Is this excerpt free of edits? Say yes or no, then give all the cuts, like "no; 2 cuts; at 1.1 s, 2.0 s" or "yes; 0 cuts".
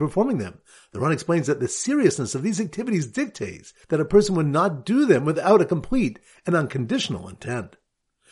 no; 1 cut; at 3.8 s